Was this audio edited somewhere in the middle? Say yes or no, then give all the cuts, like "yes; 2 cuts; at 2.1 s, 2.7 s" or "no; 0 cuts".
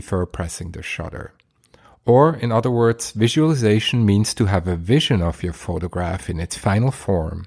no; 0 cuts